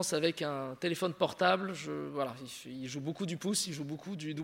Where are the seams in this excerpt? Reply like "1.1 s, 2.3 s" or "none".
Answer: none